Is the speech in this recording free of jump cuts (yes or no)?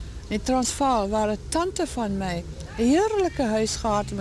yes